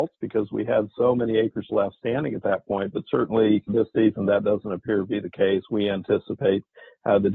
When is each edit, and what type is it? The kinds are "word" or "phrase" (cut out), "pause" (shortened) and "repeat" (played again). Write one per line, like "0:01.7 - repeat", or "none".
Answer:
0:01.7 - word
0:03.7 - word